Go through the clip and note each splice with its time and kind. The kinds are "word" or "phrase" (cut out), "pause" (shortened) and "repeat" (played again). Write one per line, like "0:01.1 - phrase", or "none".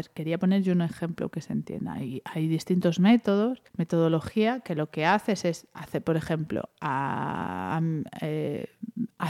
0:03.7 - pause